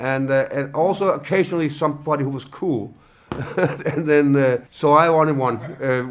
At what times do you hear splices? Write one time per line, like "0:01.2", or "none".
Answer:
0:04.7